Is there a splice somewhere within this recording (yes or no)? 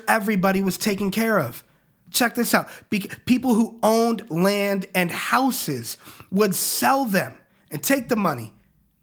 no